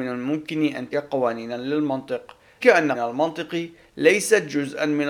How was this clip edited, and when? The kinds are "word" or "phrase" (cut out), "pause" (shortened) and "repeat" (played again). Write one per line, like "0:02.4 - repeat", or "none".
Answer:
0:00.9 - word
0:02.6 - word
0:02.9 - word